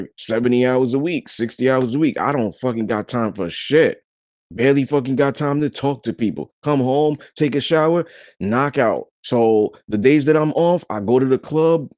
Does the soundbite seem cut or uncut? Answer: cut